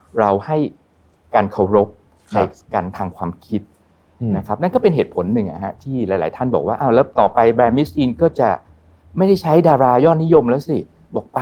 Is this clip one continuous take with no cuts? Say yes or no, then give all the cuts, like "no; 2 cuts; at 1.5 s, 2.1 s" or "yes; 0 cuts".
yes; 0 cuts